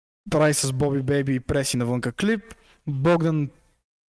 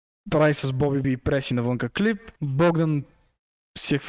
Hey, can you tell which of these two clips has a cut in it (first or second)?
second